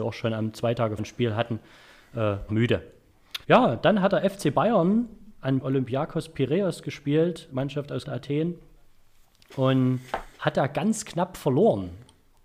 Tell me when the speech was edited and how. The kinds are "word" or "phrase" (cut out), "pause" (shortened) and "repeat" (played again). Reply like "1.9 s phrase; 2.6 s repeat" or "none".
1.0 s word; 2.5 s word; 3.4 s pause; 5.6 s phrase; 7.5 s word; 8.1 s word; 10.3 s pause